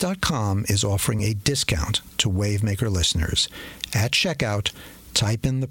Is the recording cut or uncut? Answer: uncut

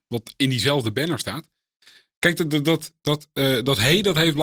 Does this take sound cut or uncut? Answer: uncut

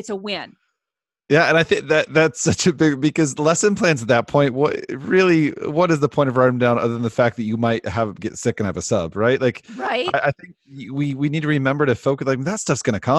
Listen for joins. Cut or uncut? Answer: uncut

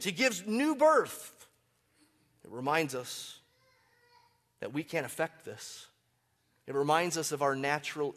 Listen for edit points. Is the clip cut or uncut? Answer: uncut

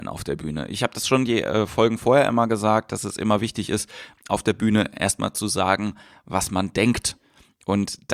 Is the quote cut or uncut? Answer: uncut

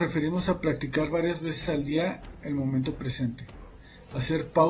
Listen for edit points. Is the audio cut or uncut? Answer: uncut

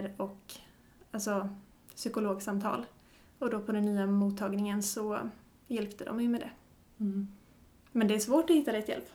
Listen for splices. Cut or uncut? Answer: uncut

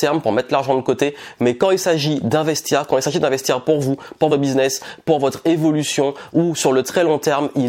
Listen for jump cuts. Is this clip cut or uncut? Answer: cut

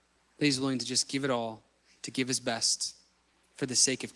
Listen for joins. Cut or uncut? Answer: uncut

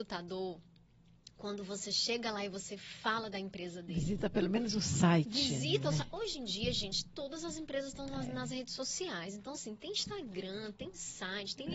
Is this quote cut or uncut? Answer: uncut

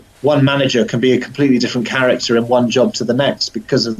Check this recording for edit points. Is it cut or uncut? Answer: uncut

